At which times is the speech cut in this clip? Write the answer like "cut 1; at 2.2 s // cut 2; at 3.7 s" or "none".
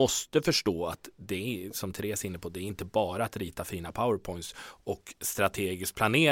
none